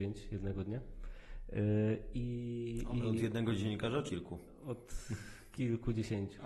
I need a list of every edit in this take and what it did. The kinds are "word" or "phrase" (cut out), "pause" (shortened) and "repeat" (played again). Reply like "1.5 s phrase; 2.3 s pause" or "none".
4.1 s word